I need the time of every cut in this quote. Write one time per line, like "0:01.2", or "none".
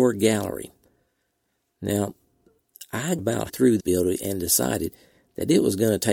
0:03.2
0:03.5
0:03.8

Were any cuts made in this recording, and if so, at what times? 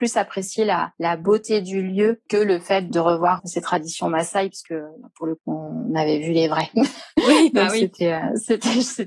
0:02.9
0:03.4
0:05.4

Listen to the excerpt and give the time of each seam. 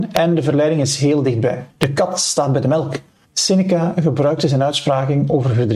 0:01.7
0:03.2

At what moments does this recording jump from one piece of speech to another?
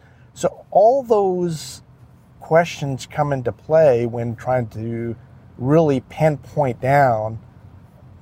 none

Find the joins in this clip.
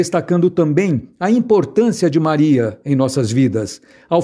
none

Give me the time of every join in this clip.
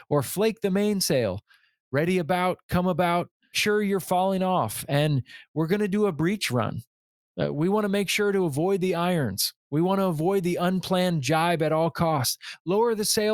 0:03.5

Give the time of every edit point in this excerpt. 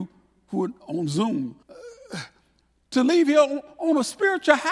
0:01.6

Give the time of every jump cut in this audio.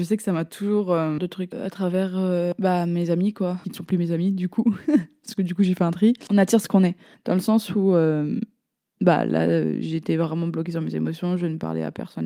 0:01.2

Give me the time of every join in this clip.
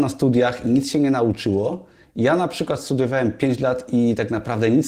none

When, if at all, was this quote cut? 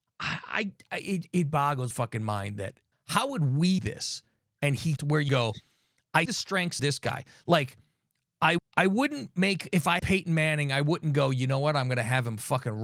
0:01.9
0:02.9
0:03.8
0:05.0
0:05.3
0:06.3
0:06.8
0:08.6
0:10.0

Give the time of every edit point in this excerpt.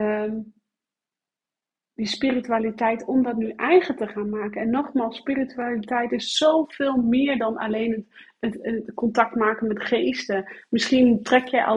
none

